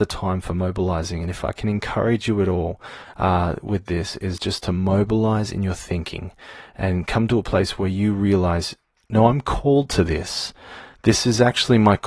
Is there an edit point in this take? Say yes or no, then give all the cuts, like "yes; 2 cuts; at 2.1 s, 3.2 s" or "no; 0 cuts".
no; 0 cuts